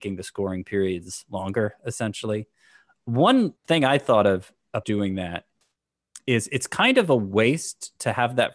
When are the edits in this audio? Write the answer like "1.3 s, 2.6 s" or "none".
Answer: 3.6 s, 4.8 s